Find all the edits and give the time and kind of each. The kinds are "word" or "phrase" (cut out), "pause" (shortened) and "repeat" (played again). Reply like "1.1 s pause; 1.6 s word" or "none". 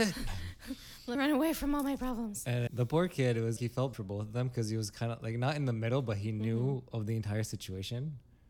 1.1 s word; 2.7 s word; 3.6 s word; 3.9 s word